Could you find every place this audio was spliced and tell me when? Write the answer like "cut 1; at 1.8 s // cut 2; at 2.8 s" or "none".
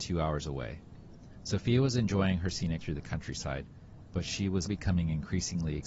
cut 1; at 2.8 s // cut 2; at 4.7 s